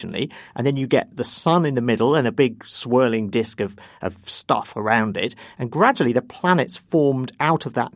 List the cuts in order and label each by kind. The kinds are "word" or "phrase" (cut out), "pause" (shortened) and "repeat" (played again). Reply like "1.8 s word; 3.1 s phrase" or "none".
none